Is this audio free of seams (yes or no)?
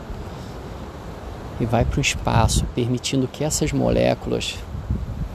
yes